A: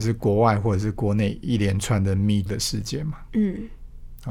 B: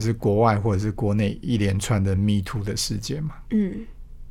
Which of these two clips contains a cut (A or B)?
A